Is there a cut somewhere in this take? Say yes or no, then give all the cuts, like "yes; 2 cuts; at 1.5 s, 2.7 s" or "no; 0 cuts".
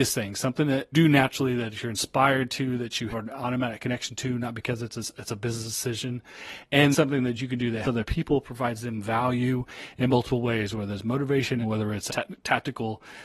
yes; 6 cuts; at 0.9 s, 3.1 s, 6.9 s, 7.8 s, 11.6 s, 12.1 s